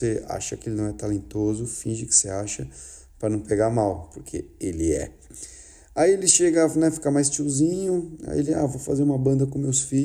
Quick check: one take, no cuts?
yes; 0 cuts

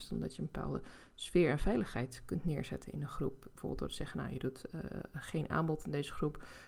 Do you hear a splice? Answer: no; 0 cuts

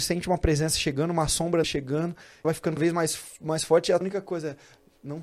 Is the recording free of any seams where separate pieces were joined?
no; 4 cuts; at 1.6 s, 2.4 s, 2.8 s, 4.0 s

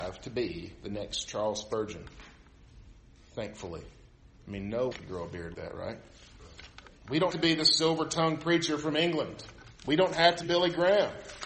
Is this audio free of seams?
no; 6 cuts; at 4.9 s, 5.5 s, 7.0 s, 7.3 s, 9.8 s, 10.4 s

